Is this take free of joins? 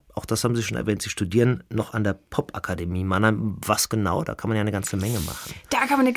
yes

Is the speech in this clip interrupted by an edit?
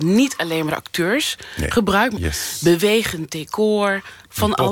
yes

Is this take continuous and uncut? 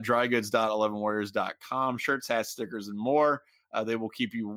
yes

